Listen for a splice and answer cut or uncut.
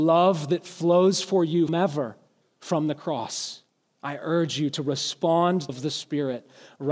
cut